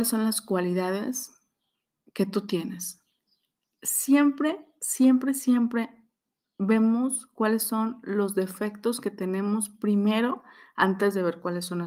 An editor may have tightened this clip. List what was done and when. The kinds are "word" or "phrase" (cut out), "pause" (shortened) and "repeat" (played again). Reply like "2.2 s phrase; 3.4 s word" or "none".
none